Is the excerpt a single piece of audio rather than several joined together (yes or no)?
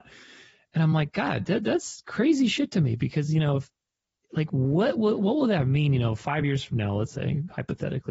yes